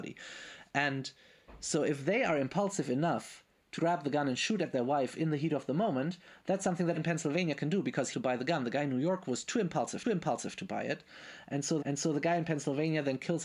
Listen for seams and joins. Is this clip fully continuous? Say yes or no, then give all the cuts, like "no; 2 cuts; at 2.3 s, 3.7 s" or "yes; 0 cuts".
no; 5 cuts; at 3.8 s, 6.9 s, 8.1 s, 10.0 s, 11.8 s